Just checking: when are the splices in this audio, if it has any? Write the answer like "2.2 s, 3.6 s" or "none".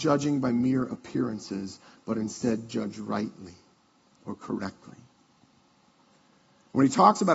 none